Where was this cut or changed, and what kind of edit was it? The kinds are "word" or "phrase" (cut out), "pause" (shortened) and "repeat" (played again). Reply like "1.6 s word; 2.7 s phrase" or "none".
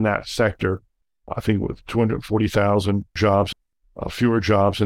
none

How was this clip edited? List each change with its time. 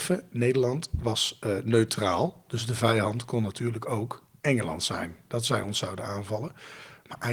none

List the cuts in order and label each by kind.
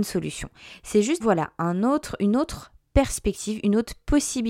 1.2 s word

